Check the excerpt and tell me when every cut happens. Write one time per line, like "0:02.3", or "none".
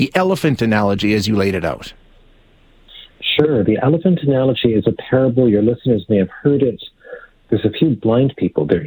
none